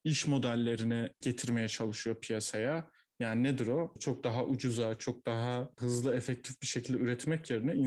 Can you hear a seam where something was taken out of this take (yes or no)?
no